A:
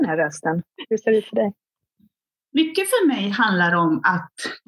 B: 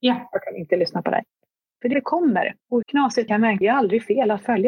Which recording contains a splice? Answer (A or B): B